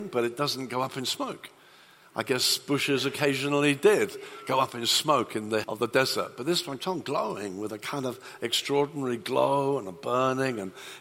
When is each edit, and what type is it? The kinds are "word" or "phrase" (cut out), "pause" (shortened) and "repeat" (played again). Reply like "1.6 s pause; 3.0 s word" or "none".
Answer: 5.6 s word; 6.8 s word